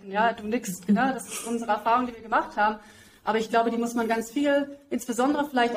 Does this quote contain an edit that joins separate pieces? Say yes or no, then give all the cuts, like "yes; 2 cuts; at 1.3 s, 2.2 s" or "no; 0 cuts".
no; 0 cuts